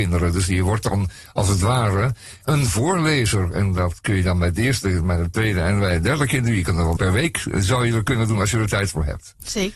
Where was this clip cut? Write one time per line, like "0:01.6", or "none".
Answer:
0:02.4
0:07.0